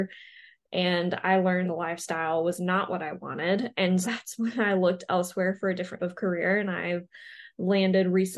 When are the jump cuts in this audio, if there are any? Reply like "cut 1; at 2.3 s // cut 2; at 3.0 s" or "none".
cut 1; at 1.7 s // cut 2; at 4.0 s // cut 3; at 6.0 s

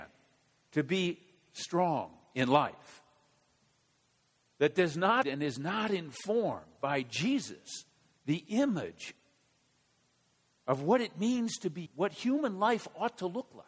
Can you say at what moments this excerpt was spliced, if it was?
cut 1; at 5.2 s // cut 2; at 11.9 s

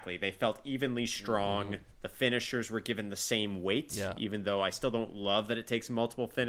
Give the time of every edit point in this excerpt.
none

